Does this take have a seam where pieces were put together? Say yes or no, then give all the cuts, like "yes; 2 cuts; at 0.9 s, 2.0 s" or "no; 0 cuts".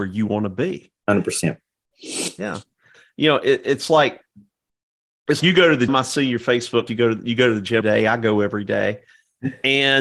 yes; 4 cuts; at 5.4 s, 5.9 s, 6.9 s, 7.8 s